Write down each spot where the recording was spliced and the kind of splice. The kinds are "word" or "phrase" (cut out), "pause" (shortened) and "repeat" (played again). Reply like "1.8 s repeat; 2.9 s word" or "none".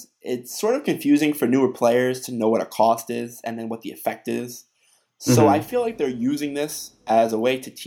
none